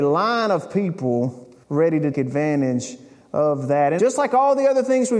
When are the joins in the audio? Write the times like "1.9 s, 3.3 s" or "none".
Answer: 1.6 s, 2.1 s, 4.0 s